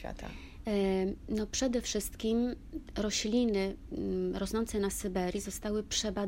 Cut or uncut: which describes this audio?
uncut